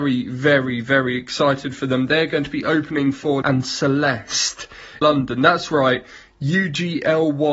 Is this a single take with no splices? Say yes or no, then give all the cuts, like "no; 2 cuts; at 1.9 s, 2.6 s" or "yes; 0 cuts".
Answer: no; 2 cuts; at 3.4 s, 5.0 s